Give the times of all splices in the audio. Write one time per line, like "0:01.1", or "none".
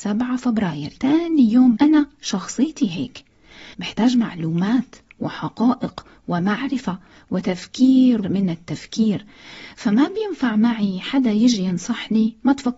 0:01.0
0:01.8
0:03.7
0:08.2